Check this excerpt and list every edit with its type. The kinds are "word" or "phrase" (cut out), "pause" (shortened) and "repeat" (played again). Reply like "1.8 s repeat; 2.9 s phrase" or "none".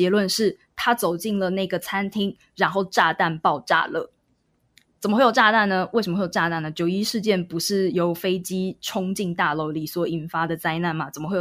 none